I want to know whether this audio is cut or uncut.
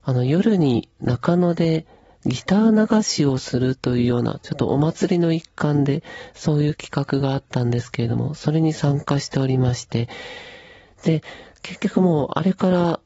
uncut